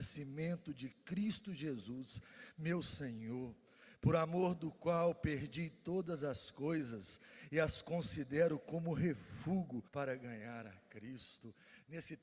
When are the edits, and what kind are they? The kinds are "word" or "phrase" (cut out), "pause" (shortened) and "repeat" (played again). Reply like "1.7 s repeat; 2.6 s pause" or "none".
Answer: 9.9 s pause